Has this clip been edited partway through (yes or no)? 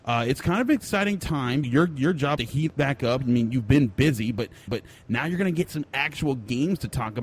yes